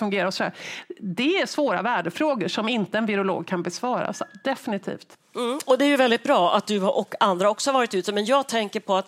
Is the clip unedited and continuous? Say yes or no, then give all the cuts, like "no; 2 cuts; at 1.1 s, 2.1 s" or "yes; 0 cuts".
yes; 0 cuts